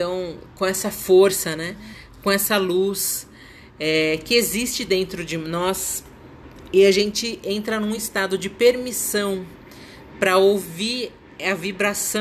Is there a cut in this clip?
no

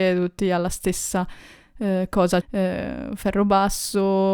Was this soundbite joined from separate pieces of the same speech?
yes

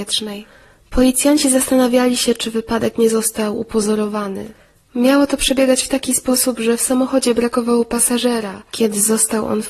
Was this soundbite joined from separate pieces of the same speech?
no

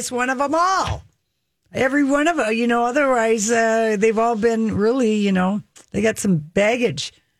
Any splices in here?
no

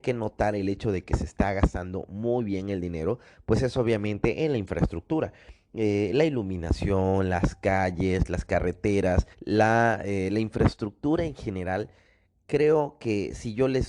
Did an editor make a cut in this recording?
yes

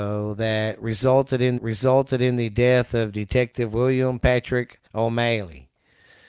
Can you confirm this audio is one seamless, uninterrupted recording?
no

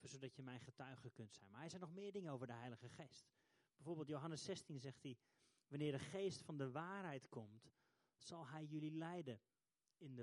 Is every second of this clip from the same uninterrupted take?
yes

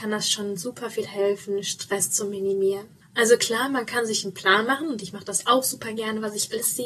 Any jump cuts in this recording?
yes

